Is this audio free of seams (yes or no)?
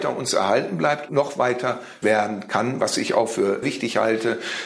no